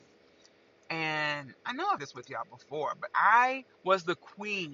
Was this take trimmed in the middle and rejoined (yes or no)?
yes